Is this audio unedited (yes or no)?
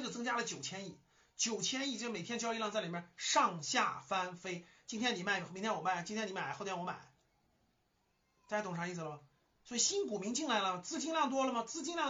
yes